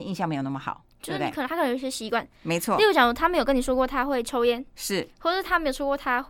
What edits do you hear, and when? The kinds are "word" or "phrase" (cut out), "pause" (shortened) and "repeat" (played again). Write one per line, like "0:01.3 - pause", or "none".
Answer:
0:00.9 - pause